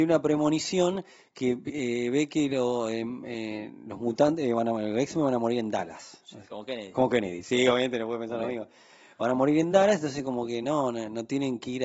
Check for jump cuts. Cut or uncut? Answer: uncut